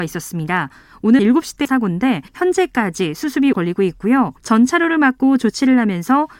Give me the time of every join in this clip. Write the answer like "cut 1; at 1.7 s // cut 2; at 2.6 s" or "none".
cut 1; at 1.2 s // cut 2; at 1.6 s // cut 3; at 2.3 s // cut 4; at 3.5 s // cut 5; at 4.4 s

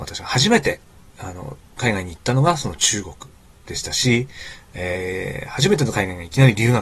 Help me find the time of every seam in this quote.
cut 1; at 1.7 s

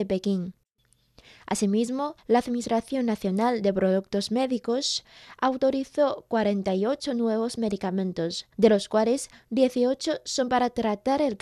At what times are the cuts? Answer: cut 1; at 2.2 s // cut 2; at 8.5 s

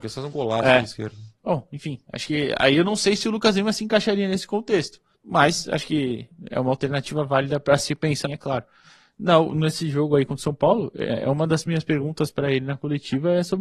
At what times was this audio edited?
cut 1; at 5.1 s // cut 2; at 8.2 s

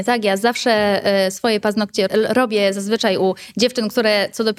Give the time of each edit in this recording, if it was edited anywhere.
cut 1; at 2.1 s

